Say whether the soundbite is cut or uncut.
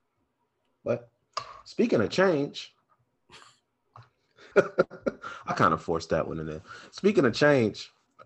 cut